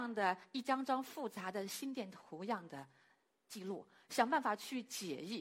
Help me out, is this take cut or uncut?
uncut